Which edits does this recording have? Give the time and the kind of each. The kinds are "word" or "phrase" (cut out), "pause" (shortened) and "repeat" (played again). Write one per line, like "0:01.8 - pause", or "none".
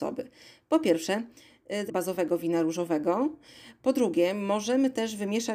0:01.9 - phrase